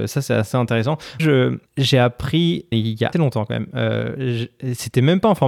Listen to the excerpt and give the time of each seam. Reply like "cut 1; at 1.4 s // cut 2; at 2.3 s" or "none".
cut 1; at 1.2 s // cut 2; at 1.7 s // cut 3; at 2.7 s // cut 4; at 3.1 s